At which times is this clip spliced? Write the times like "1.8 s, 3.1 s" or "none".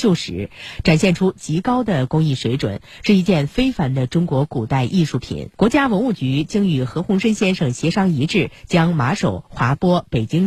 5.5 s